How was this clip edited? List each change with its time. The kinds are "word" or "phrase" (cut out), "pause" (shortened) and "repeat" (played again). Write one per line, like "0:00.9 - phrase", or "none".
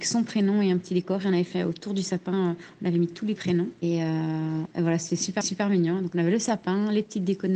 0:03.4 - phrase
0:05.4 - repeat